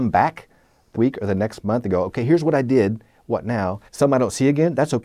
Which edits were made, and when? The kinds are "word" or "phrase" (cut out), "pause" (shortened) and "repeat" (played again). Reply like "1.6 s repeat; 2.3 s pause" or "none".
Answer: 0.9 s word; 3.9 s pause